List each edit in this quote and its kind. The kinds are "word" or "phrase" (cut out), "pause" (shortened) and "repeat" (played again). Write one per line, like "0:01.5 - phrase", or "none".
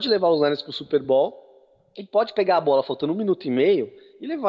none